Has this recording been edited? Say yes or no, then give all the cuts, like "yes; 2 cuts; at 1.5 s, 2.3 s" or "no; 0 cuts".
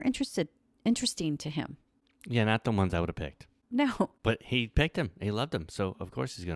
no; 0 cuts